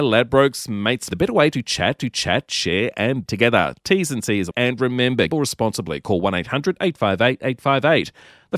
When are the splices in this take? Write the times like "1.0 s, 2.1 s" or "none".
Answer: 1.1 s, 2.0 s, 3.3 s, 4.5 s, 5.3 s